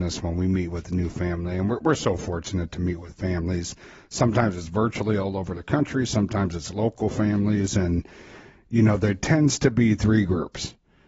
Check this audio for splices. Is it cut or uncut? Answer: uncut